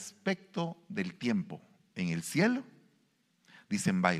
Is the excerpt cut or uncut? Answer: uncut